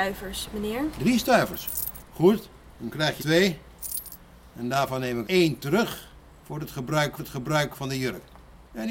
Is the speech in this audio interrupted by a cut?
yes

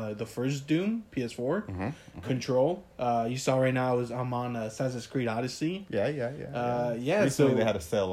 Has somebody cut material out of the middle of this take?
yes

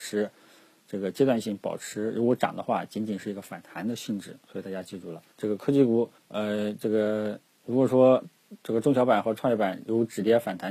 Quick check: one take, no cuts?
no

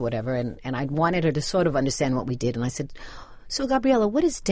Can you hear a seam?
no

